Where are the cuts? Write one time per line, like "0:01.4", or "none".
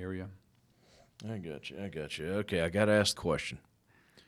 0:03.2